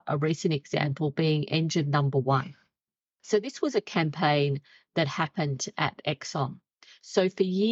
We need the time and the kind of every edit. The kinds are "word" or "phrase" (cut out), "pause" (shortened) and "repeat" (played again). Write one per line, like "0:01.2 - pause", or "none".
none